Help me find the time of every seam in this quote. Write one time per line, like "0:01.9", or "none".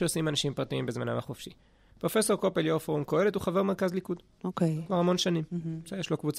none